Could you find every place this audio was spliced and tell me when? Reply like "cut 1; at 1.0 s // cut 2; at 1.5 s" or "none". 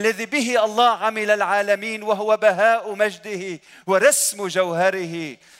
none